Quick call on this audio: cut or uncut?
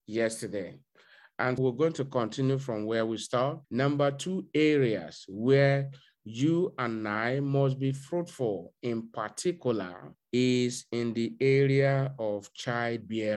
cut